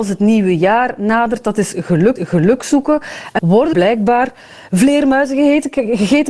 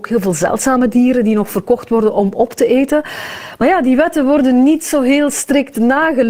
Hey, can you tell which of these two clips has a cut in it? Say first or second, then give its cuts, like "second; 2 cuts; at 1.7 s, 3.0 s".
first; 3 cuts; at 2.2 s, 3.4 s, 3.7 s